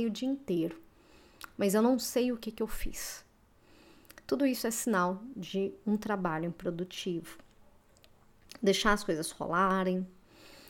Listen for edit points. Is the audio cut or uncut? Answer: uncut